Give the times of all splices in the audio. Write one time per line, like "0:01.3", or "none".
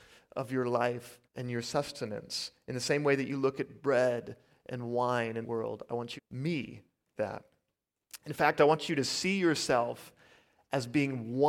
0:01.2
0:05.4
0:06.2
0:07.2